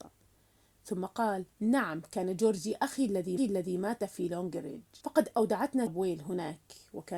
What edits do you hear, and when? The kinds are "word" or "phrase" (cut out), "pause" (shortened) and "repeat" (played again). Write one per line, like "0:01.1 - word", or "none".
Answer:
0:01.5 - pause
0:03.4 - repeat
0:05.0 - pause
0:05.9 - phrase